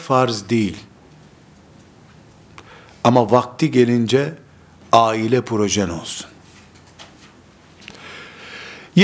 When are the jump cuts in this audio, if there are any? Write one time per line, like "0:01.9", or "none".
none